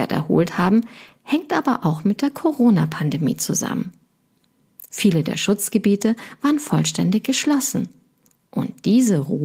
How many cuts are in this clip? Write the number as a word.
zero